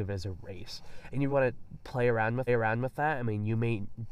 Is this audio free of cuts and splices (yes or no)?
no